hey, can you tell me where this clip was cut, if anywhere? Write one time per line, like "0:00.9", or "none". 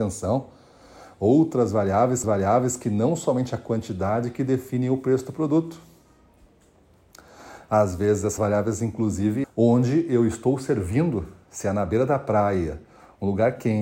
0:02.2
0:08.4
0:09.4